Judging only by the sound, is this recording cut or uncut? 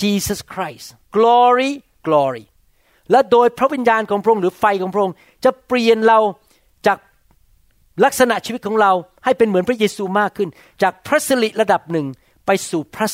cut